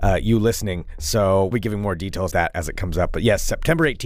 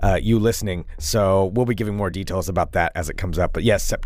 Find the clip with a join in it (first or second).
first